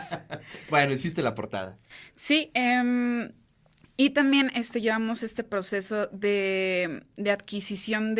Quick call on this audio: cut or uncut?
uncut